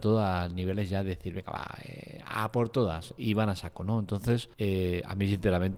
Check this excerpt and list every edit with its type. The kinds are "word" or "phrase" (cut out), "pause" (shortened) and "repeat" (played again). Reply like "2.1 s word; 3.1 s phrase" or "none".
4.5 s pause